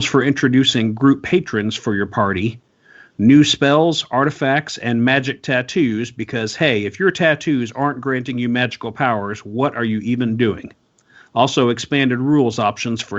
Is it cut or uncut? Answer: uncut